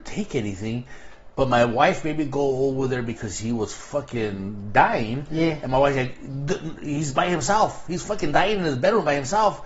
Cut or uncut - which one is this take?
uncut